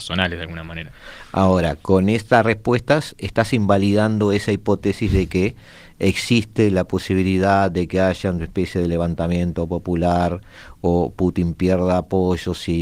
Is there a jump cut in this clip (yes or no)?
no